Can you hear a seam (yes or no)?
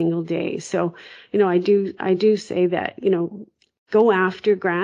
no